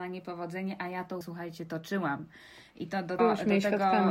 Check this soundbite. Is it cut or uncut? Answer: cut